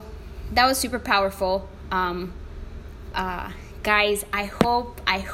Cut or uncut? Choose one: cut